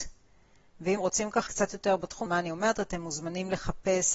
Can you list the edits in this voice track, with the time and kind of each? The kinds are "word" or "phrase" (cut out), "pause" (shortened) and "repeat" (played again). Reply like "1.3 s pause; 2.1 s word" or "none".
1.0 s word; 1.5 s word; 2.3 s word